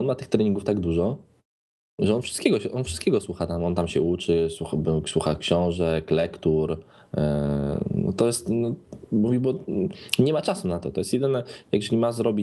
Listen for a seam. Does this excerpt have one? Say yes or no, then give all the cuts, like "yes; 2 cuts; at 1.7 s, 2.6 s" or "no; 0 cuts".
no; 0 cuts